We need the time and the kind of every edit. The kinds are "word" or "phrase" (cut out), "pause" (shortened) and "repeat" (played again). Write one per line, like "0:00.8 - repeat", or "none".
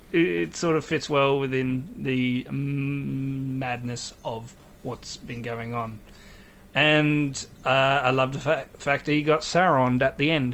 none